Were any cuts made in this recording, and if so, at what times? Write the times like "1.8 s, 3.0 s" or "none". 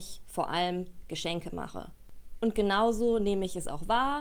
none